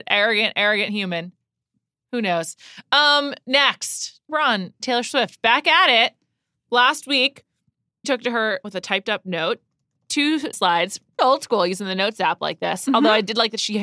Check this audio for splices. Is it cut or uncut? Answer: cut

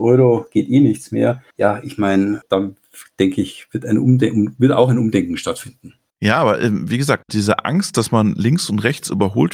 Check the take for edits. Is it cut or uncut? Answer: cut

